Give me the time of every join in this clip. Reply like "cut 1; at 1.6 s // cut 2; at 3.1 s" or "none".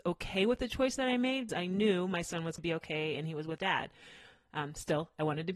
cut 1; at 1.5 s // cut 2; at 2.6 s // cut 3; at 3.6 s